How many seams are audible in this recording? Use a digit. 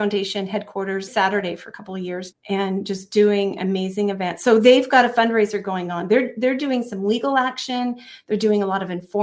2